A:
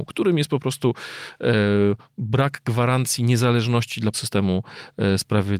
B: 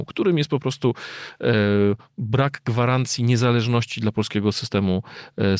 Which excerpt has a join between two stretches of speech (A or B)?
A